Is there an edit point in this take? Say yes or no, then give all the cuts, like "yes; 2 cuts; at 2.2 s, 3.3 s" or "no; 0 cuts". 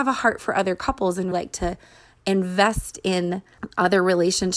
yes; 1 cut; at 1.3 s